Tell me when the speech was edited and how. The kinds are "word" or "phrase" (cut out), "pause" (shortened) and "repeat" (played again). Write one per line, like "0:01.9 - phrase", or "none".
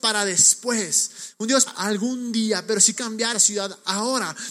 0:01.7 - word
0:03.0 - word
0:03.3 - word